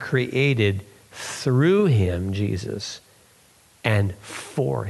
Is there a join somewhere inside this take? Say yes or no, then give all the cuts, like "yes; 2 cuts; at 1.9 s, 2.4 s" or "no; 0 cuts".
no; 0 cuts